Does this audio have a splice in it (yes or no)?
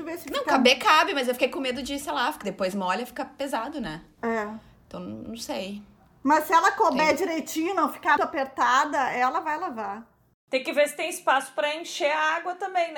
yes